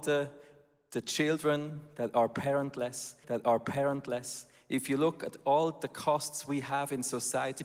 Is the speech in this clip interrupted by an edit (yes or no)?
yes